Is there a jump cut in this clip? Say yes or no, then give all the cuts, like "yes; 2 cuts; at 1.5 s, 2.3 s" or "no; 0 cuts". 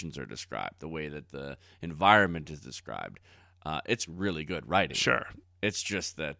no; 0 cuts